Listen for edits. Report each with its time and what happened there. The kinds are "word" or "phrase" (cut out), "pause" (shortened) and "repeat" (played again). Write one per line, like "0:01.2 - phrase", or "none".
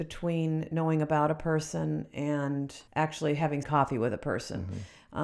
0:02.9 - pause
0:03.6 - phrase